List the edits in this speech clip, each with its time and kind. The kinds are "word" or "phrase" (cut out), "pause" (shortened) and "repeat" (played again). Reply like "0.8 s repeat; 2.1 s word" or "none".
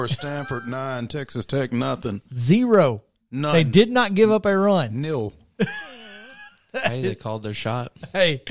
none